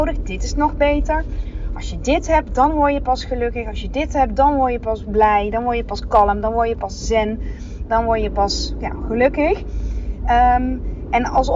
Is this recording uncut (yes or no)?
yes